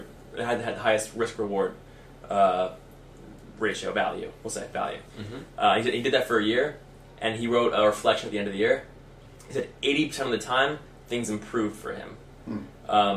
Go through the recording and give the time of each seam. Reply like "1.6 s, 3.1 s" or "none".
5.1 s